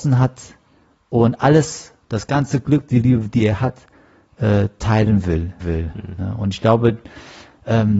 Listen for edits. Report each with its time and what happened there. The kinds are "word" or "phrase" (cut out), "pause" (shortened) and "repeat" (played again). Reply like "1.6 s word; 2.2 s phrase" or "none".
5.6 s word